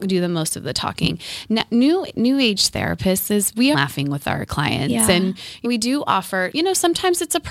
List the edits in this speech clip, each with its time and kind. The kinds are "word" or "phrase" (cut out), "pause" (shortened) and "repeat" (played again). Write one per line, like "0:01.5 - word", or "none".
0:03.7 - phrase
0:05.6 - word
0:06.5 - word